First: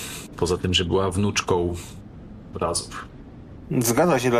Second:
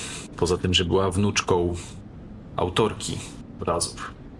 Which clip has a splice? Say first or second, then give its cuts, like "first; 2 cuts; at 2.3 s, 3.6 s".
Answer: first; 1 cut; at 2.5 s